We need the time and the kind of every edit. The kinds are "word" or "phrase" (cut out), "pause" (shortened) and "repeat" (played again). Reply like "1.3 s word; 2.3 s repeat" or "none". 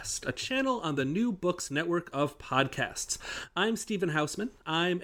none